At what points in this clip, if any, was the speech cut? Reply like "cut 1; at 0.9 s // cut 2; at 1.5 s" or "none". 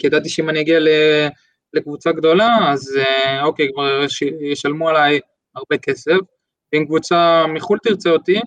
none